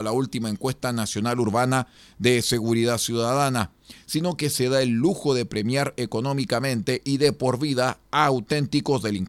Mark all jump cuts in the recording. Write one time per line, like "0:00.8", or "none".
none

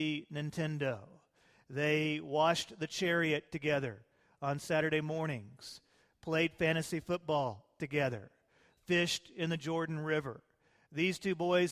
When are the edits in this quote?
none

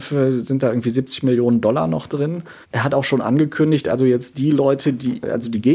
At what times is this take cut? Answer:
0:02.6

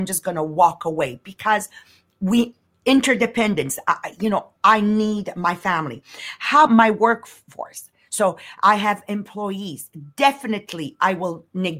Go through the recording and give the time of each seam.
0:06.7

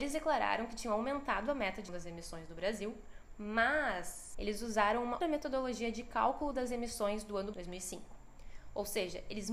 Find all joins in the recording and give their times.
0:01.9
0:05.2
0:07.5

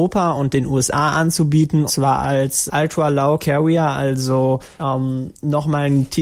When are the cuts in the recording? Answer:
0:01.9
0:02.7
0:03.4
0:04.8

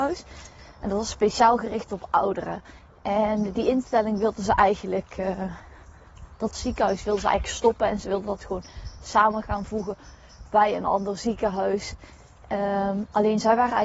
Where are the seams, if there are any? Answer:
none

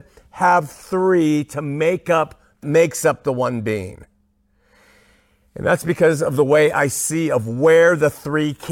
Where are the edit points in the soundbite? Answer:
0:02.6

